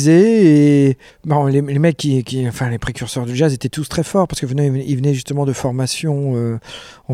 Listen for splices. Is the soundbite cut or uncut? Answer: cut